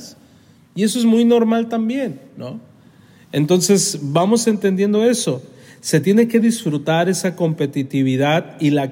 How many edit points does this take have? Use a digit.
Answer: 0